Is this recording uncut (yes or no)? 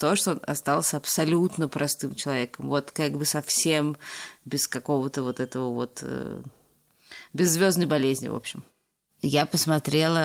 yes